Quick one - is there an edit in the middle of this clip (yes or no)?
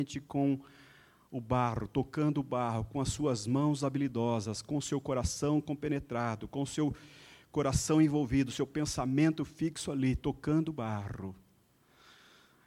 no